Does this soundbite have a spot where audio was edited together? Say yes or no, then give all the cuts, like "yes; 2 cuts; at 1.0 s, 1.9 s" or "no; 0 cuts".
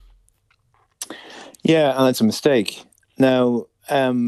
yes; 1 cut; at 2.1 s